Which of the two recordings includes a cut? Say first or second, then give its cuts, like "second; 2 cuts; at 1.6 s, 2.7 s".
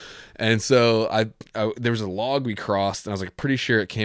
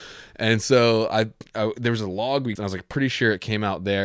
second; 1 cut; at 2.6 s